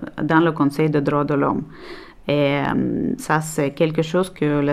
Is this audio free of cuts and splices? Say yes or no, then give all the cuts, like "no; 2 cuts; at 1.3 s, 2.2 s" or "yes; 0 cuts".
yes; 0 cuts